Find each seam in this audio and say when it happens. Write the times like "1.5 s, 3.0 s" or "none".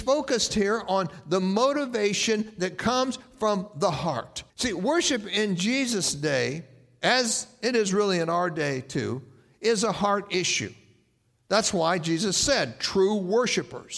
4.5 s